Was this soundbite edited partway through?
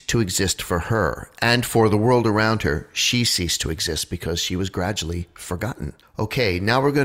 yes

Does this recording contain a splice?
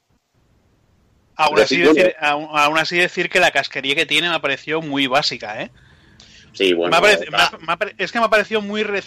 no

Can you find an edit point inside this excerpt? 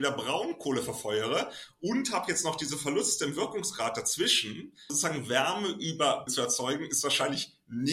yes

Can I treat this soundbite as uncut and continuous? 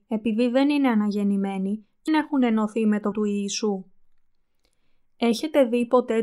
no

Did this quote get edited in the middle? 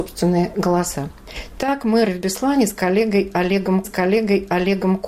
yes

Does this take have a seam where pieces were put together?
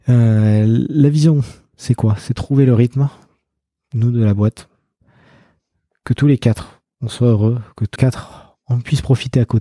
yes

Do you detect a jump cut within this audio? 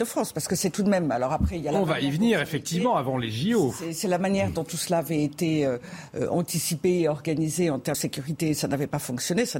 yes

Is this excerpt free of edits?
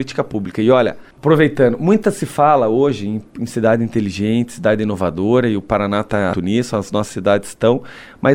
no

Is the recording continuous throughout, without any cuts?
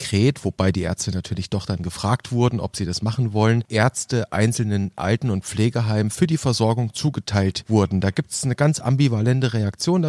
yes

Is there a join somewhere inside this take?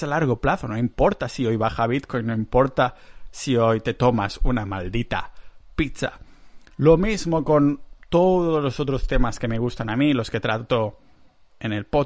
no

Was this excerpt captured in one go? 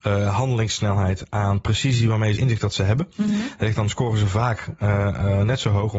no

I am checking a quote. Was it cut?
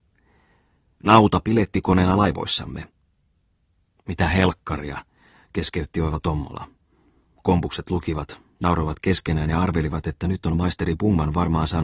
no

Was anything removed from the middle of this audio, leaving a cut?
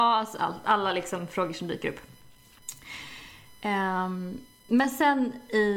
no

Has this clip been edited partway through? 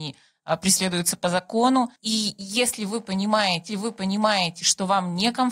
yes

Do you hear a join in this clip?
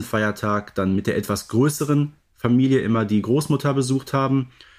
no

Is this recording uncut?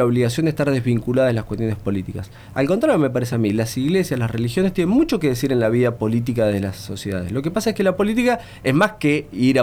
yes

